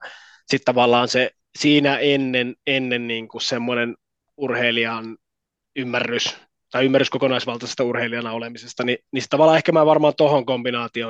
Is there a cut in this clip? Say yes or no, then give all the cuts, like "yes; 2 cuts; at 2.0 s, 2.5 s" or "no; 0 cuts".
no; 0 cuts